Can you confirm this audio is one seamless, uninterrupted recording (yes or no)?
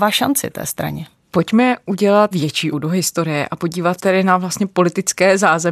no